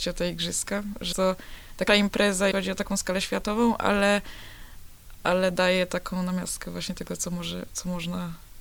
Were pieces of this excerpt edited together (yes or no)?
yes